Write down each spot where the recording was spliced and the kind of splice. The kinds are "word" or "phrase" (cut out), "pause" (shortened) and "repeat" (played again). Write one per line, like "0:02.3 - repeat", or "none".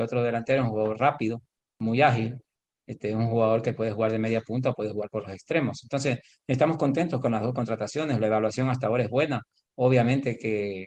none